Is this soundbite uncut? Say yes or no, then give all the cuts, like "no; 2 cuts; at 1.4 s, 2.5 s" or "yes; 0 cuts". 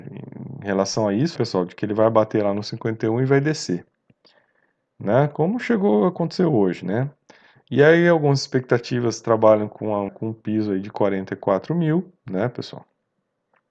no; 2 cuts; at 1.4 s, 10.1 s